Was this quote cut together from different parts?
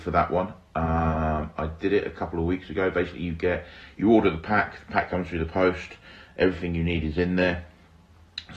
no; 0 cuts

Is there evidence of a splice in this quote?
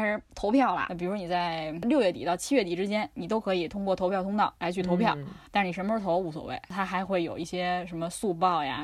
yes; 1 cut; at 5.5 s

